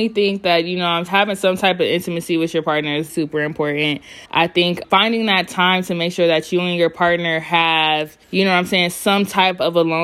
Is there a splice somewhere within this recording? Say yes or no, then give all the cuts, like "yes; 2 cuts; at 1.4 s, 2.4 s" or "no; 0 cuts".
yes; 5 cuts; at 1.1 s, 3.1 s, 4.3 s, 4.8 s, 8.2 s